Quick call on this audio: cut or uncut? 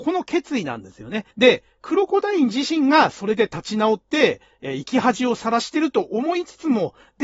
cut